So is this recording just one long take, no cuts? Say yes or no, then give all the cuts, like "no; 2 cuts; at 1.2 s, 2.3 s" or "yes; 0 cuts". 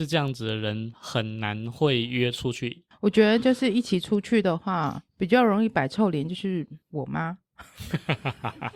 no; 2 cuts; at 5.1 s, 6.8 s